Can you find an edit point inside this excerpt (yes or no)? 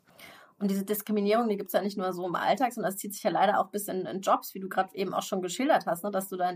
no